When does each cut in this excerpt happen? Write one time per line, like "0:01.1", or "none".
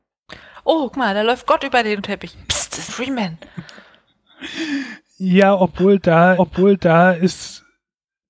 0:00.9
0:02.0
0:02.9
0:06.4

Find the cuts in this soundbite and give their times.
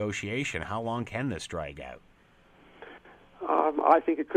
none

